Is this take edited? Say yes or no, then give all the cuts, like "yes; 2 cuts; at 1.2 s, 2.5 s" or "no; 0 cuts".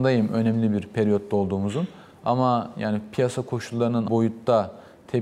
yes; 1 cut; at 4.1 s